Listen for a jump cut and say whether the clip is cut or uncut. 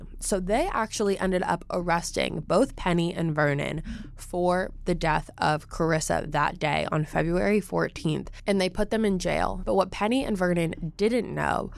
uncut